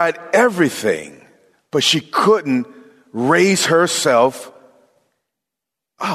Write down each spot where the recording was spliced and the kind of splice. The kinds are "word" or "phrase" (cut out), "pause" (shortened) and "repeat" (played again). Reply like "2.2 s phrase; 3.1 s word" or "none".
1.5 s pause